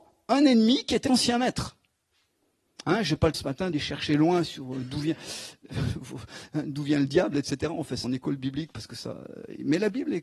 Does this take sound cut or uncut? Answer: cut